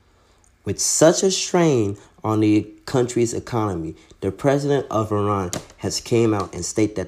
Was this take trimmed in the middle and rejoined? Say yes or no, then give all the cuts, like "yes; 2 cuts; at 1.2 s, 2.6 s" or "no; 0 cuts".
no; 0 cuts